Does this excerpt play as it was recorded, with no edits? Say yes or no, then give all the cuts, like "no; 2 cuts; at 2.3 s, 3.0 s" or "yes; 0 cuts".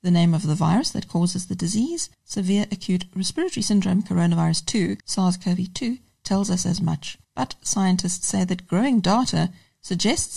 no; 3 cuts; at 2.1 s, 5.0 s, 7.2 s